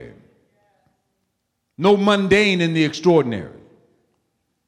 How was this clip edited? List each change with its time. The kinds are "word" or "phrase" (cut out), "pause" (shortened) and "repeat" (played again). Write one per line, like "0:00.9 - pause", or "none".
none